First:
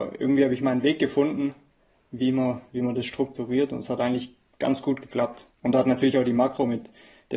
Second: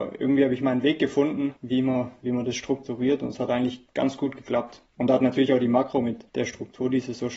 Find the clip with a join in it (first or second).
second